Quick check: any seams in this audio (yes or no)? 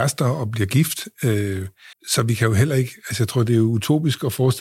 yes